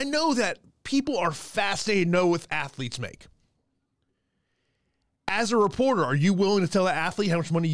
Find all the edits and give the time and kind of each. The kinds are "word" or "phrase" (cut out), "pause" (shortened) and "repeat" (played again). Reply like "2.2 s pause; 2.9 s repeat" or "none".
none